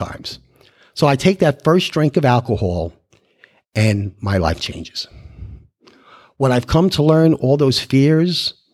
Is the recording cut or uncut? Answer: uncut